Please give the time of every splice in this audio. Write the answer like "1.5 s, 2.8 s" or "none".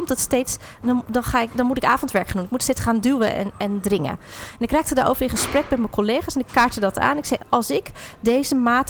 7.4 s